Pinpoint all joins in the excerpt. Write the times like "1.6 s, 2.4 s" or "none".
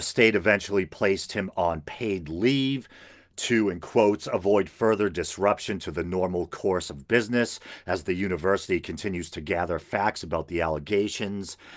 none